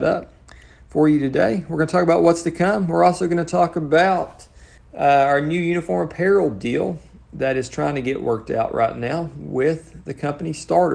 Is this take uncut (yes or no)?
no